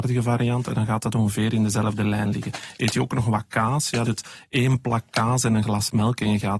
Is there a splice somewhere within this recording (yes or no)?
yes